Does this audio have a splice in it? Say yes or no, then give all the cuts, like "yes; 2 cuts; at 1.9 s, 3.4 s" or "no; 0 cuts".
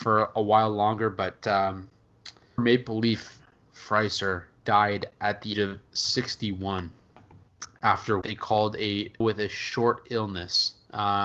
yes; 6 cuts; at 2.6 s, 3.7 s, 4.6 s, 5.5 s, 8.2 s, 9.2 s